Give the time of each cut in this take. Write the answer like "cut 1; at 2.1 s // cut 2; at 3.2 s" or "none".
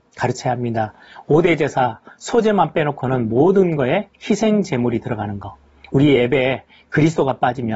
none